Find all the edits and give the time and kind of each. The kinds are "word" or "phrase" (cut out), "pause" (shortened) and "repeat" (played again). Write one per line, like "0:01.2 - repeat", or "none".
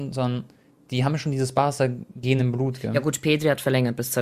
none